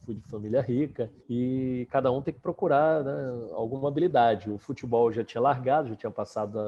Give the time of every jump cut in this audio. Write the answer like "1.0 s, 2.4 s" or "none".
1.2 s